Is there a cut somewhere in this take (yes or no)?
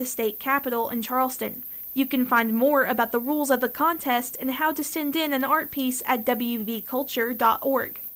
no